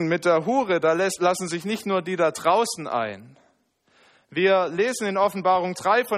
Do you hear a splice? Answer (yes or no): no